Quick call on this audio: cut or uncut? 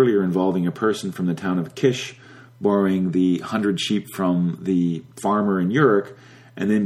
uncut